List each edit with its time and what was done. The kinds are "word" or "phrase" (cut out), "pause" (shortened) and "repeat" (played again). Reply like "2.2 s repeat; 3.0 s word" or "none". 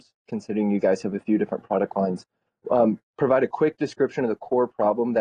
none